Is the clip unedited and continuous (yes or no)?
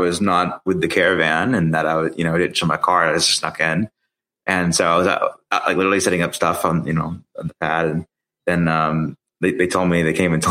yes